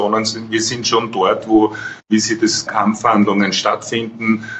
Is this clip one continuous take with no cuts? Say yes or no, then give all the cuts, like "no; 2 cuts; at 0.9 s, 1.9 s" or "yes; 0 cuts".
no; 1 cut; at 2.7 s